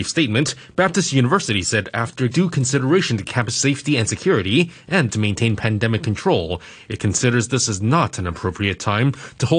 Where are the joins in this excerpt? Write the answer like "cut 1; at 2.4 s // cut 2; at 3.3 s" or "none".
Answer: cut 1; at 2.3 s // cut 2; at 5.1 s